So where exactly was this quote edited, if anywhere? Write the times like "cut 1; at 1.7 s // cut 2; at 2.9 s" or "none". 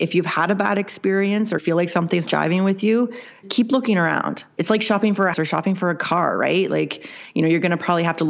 cut 1; at 1.6 s // cut 2; at 2.3 s // cut 3; at 3.4 s // cut 4; at 4.6 s // cut 5; at 5.3 s